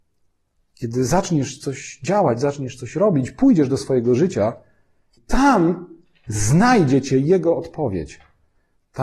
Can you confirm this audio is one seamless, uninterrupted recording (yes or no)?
yes